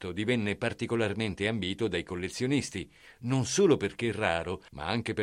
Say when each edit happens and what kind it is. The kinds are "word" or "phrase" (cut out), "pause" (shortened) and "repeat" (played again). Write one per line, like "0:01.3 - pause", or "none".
none